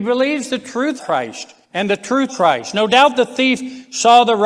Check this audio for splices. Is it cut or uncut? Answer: cut